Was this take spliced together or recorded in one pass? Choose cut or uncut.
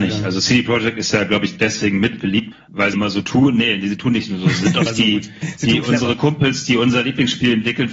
cut